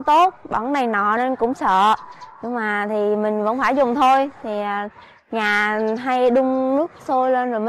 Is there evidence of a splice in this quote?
no; 0 cuts

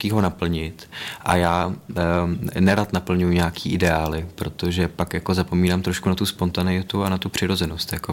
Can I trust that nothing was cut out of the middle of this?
yes; 0 cuts

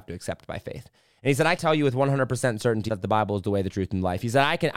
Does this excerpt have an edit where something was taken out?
yes; 2 cuts; at 1.6 s, 2.9 s

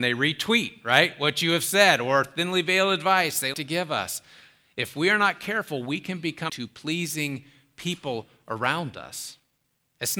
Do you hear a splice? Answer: yes; 2 cuts; at 3.5 s, 6.5 s

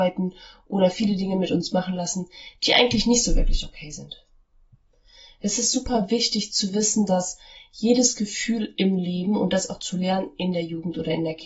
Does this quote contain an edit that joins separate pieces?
no; 0 cuts

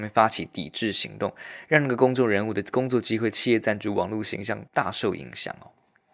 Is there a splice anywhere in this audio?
yes; 1 cut; at 4.7 s

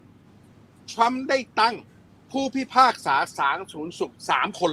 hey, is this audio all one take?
no; 1 cut; at 2.1 s

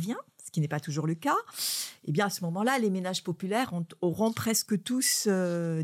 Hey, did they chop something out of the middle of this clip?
no; 0 cuts

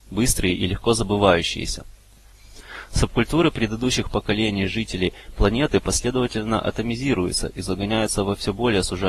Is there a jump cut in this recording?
no; 0 cuts

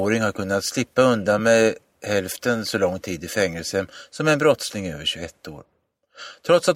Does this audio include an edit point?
no; 0 cuts

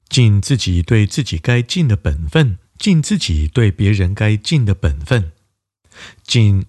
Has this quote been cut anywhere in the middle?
yes; 1 cut; at 2.7 s

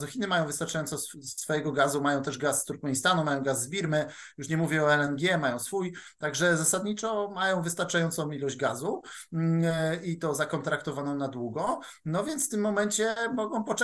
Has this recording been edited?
no; 0 cuts

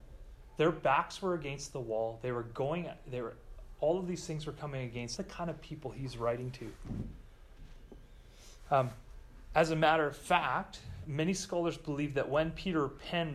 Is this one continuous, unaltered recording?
no; 2 cuts; at 5.2 s, 11.0 s

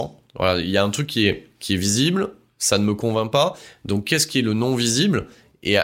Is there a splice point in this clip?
no; 0 cuts

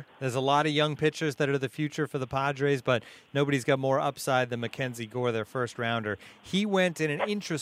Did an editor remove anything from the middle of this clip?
no; 0 cuts

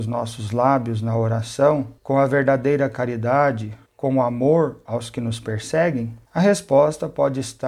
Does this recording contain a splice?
yes; 3 cuts; at 2.0 s, 3.9 s, 6.3 s

